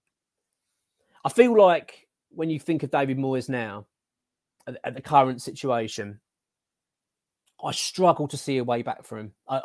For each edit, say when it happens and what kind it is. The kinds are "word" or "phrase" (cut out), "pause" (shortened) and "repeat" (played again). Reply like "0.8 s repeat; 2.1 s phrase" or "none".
none